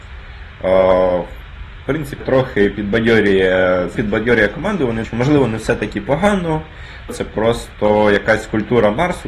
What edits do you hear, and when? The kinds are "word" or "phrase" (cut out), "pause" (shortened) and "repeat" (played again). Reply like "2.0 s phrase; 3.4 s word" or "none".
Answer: 2.2 s word; 3.9 s word; 5.0 s word; 7.1 s word